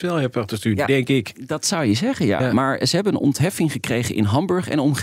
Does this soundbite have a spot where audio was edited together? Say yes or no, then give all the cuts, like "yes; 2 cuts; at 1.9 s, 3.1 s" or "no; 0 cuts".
no; 0 cuts